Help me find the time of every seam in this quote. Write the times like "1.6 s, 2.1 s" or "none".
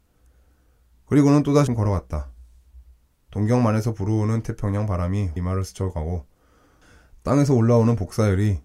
1.7 s, 5.4 s